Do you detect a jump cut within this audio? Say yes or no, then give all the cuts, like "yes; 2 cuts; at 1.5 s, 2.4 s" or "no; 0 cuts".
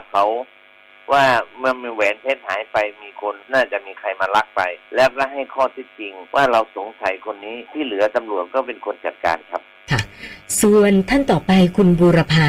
yes; 5 cuts; at 3.4 s, 4.8 s, 6.3 s, 7.7 s, 9.8 s